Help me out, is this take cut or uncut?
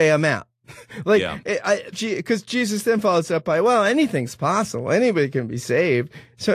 cut